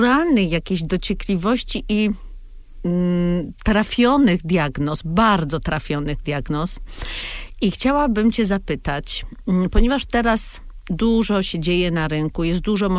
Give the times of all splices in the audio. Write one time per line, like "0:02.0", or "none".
none